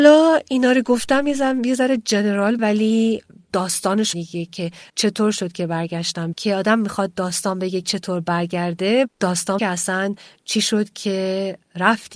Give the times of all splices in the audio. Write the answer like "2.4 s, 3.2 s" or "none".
2.6 s, 3.5 s, 4.1 s, 4.9 s, 6.3 s, 7.8 s, 9.1 s, 9.6 s

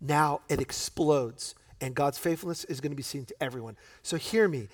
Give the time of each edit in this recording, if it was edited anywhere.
none

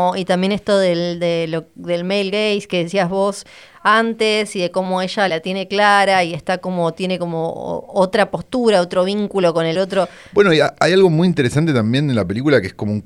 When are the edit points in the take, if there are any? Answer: 5.3 s, 9.7 s

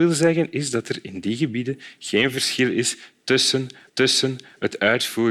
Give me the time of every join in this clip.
3.9 s

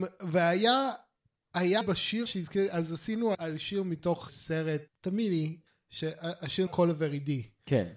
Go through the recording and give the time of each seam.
1.8 s, 2.3 s, 3.3 s, 4.3 s, 4.9 s, 6.7 s

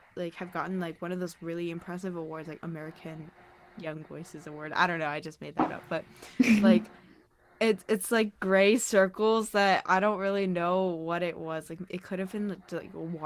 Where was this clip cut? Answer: none

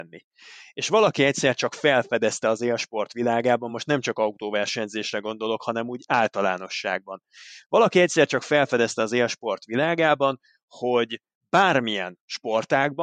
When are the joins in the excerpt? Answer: none

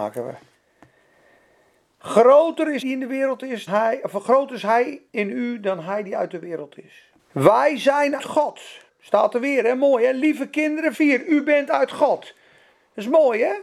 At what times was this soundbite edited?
2.8 s, 3.7 s, 5.1 s, 7.2 s, 8.2 s, 8.9 s, 10.9 s

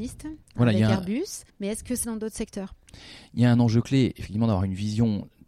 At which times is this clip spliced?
1.5 s, 2.0 s

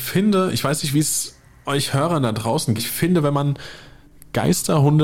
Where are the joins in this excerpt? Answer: 2.8 s

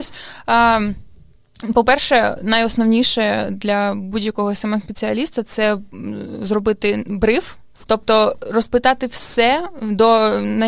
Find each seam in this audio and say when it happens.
7.8 s

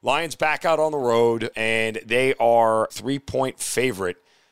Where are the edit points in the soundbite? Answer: 1.5 s, 2.9 s

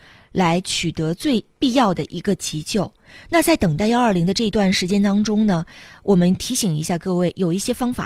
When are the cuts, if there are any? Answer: 1.5 s

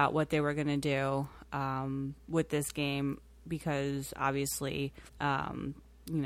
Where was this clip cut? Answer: 5.1 s

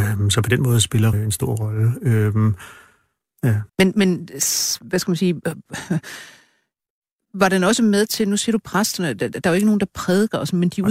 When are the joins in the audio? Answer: 1.1 s, 3.7 s

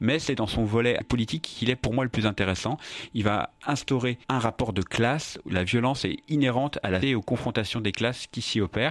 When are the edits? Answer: 1.0 s, 4.2 s, 5.4 s, 7.0 s

